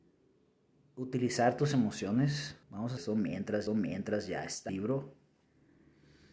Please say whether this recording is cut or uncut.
cut